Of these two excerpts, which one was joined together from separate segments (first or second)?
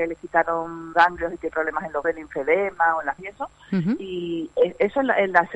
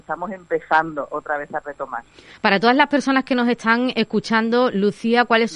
first